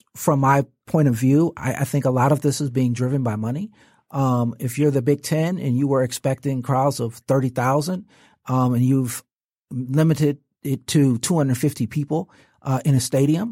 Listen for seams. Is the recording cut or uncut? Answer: uncut